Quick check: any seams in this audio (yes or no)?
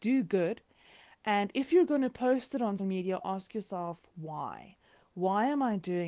yes